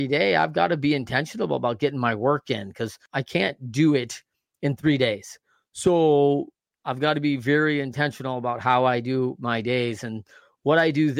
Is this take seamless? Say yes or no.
yes